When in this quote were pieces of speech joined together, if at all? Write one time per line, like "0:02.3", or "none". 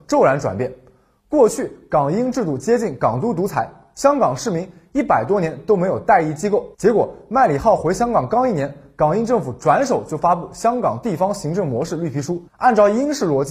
0:06.7
0:12.5